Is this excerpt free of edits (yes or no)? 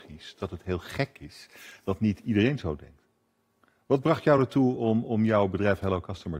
yes